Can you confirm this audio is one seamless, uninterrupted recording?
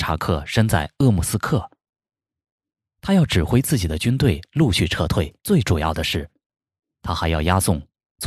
no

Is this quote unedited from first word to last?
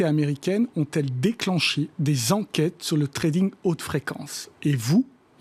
yes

